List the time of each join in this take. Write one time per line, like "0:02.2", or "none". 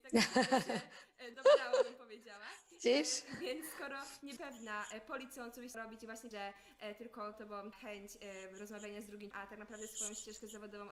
0:01.3
0:04.4
0:05.7
0:06.3
0:07.3
0:07.7
0:09.3